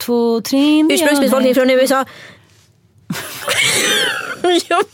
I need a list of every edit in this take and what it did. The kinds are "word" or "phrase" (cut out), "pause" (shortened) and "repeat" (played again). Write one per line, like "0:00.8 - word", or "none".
none